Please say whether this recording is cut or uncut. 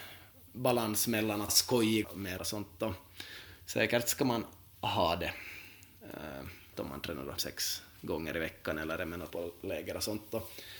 cut